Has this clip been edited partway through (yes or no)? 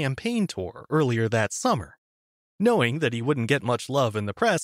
no